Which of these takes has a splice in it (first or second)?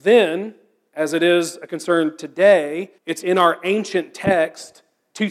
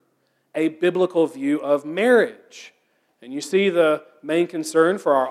first